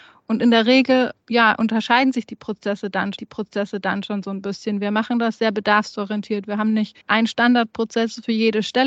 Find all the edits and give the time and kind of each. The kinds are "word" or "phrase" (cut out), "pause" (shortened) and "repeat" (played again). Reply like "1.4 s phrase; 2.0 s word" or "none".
1.2 s pause; 3.2 s repeat; 7.0 s pause